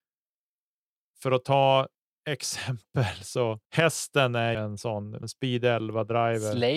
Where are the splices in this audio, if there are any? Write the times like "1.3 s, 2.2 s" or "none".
1.9 s, 3.6 s, 4.5 s, 5.2 s